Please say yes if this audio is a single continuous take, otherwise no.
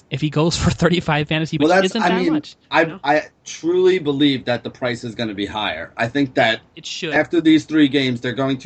no